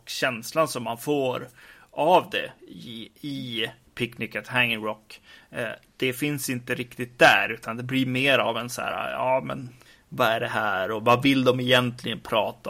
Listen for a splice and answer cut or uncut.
cut